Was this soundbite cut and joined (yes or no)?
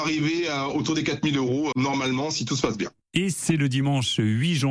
yes